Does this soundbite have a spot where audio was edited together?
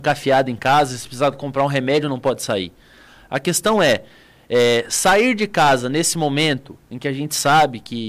no; 0 cuts

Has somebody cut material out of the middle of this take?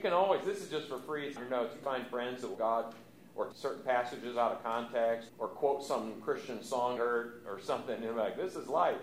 yes; 6 cuts; at 1.4 s, 1.8 s, 2.6 s, 3.5 s, 5.3 s, 7.0 s

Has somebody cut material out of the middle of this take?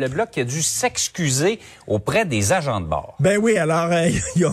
no; 0 cuts

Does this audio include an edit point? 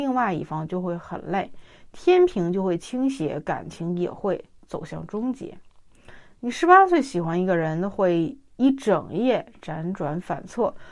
no; 0 cuts

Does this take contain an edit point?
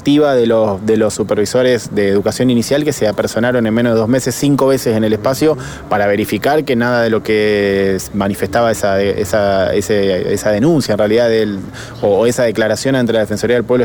no; 0 cuts

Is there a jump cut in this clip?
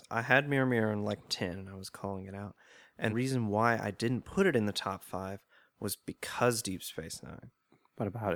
yes; 2 cuts; at 1.2 s, 3.1 s

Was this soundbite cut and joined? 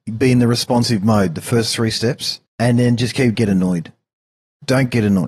yes; 2 cuts; at 2.5 s, 3.3 s

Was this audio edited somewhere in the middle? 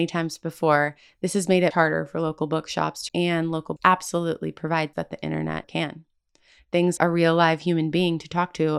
yes; 6 cuts; at 1.7 s, 3.1 s, 3.8 s, 4.9 s, 5.6 s, 7.0 s

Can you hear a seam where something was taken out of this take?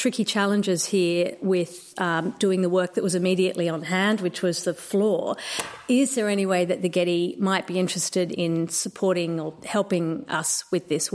no; 0 cuts

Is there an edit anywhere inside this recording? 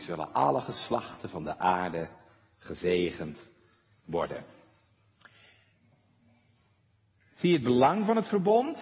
no; 0 cuts

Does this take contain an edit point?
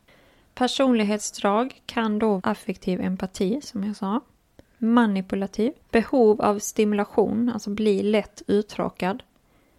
yes; 2 cuts; at 2.4 s, 5.8 s

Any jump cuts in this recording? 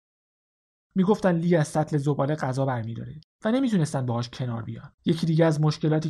yes; 1 cut; at 5.0 s

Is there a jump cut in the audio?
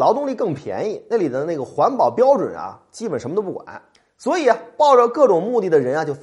yes; 1 cut; at 3.9 s

